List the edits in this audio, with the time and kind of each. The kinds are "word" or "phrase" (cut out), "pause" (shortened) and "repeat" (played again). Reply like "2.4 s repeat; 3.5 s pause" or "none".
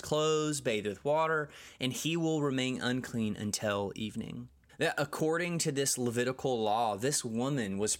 4.7 s pause